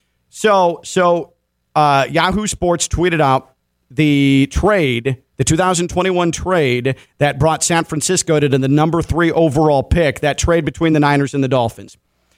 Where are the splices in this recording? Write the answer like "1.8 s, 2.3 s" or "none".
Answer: none